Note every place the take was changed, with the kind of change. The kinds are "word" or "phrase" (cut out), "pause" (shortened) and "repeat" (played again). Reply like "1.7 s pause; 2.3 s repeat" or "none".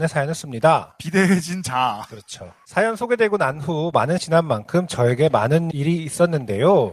4.2 s word